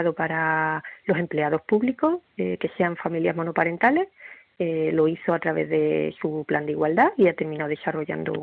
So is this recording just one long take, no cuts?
yes; 0 cuts

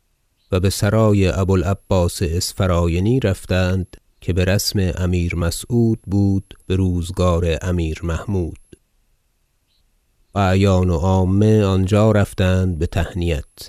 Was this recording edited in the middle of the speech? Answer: yes; 3 cuts; at 4.1 s, 6.6 s, 10.3 s

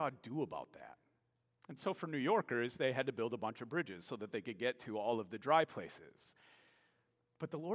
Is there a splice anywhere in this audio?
no; 0 cuts

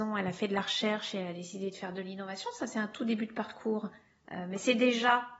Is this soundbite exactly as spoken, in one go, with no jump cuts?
yes; 0 cuts

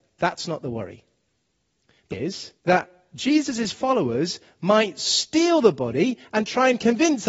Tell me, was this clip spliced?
yes; 2 cuts; at 2.1 s, 2.6 s

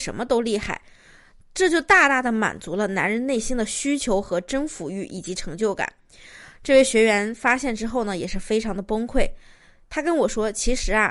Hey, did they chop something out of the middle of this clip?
no; 0 cuts

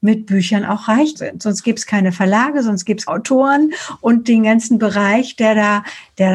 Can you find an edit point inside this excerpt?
yes; 2 cuts; at 1.1 s, 3.1 s

